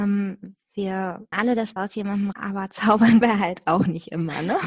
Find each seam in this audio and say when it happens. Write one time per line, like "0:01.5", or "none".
0:01.3
0:01.8
0:02.3
0:03.2